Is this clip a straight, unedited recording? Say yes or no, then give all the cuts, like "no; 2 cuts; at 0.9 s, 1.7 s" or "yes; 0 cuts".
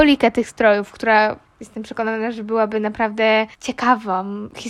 yes; 0 cuts